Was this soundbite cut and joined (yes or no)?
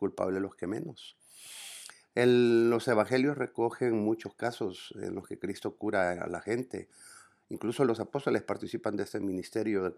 no